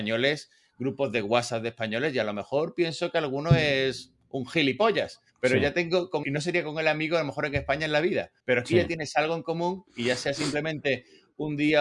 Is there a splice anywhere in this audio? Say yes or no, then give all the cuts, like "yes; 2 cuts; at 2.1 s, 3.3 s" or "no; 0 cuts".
yes; 3 cuts; at 5.3 s, 6.2 s, 8.4 s